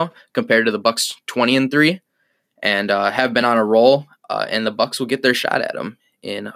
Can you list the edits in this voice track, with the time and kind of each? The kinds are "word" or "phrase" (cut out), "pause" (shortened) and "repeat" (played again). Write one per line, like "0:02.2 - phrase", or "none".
none